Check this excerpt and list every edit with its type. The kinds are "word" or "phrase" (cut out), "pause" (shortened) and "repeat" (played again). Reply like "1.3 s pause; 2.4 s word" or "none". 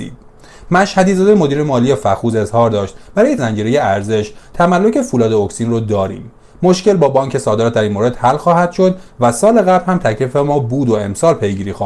3.4 s word